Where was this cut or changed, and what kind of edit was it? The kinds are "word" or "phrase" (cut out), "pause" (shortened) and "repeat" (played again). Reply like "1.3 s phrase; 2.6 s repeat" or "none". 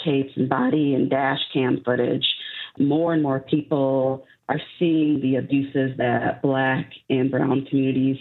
none